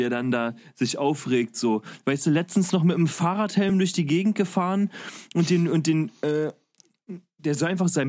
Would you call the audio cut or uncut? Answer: uncut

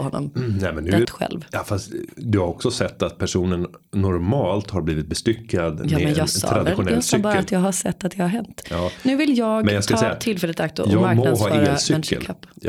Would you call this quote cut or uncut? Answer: cut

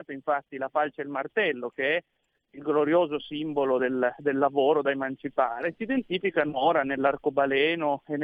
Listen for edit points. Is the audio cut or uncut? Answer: uncut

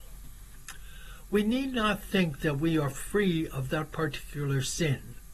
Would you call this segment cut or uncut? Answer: uncut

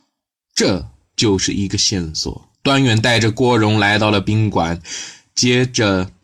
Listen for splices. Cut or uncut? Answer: cut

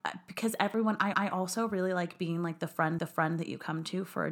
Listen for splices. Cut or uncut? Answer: cut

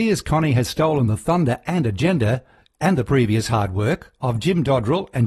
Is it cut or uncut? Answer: uncut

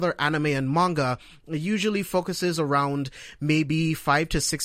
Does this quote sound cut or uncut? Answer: uncut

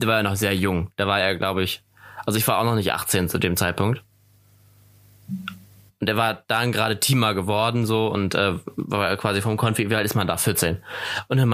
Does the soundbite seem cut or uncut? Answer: uncut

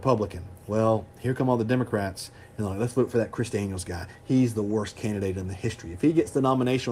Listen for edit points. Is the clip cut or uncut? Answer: uncut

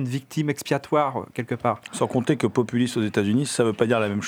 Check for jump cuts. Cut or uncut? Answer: uncut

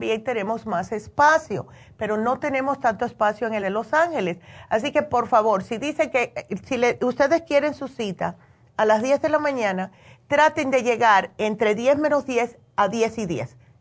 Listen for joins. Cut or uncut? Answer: cut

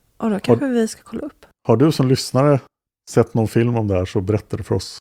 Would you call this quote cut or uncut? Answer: uncut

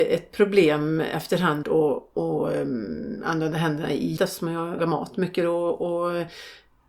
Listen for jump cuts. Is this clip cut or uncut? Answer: cut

